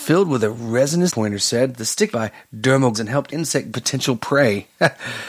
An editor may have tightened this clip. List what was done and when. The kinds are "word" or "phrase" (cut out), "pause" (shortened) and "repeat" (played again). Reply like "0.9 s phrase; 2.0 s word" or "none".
1.1 s word; 2.1 s phrase; 2.9 s word; 3.3 s word; 3.7 s word

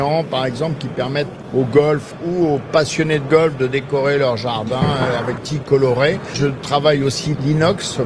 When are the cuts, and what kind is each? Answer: 5.4 s phrase

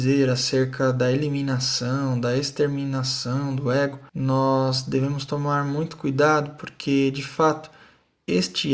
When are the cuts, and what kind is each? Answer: 4.1 s pause

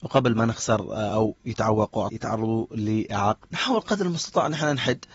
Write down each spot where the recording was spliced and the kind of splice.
1.1 s word; 2.1 s word; 3.4 s word

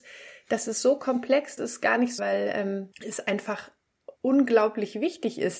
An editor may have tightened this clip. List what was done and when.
1.6 s word; 2.2 s phrase; 2.9 s pause; 4.2 s pause

